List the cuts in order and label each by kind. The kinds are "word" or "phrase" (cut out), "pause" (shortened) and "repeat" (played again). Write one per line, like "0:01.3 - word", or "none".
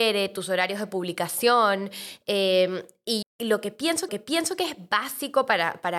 0:03.2 - phrase
0:04.1 - repeat